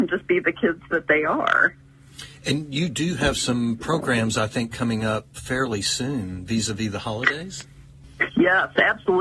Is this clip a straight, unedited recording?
no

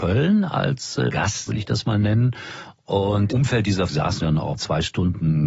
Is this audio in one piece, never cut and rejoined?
no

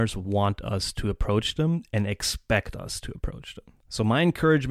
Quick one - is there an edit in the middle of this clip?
yes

